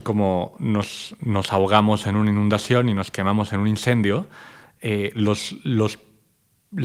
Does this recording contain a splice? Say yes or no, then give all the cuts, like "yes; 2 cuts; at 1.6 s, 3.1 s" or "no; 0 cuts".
no; 0 cuts